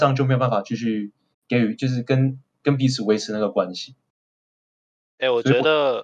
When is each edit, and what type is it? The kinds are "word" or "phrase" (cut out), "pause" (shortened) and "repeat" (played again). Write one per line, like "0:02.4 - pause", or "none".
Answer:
none